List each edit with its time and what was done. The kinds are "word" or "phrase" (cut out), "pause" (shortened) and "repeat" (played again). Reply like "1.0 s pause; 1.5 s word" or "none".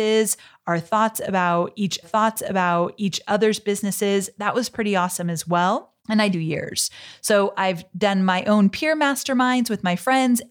2.0 s repeat; 6.0 s pause; 6.3 s phrase

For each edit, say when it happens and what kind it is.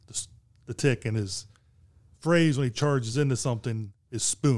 none

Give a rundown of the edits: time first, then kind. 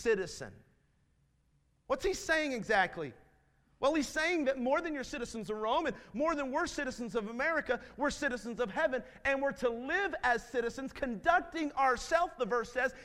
none

